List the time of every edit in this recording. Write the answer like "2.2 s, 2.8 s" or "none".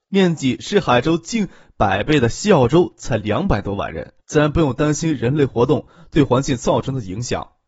4.2 s